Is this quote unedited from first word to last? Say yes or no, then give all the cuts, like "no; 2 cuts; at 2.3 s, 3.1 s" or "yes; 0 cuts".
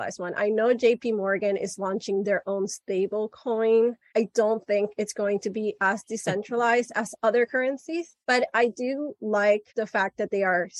no; 1 cut; at 9.7 s